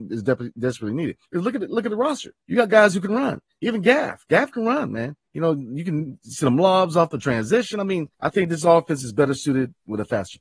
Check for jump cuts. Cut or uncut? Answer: cut